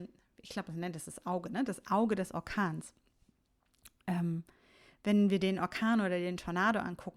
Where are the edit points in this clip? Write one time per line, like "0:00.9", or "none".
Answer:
none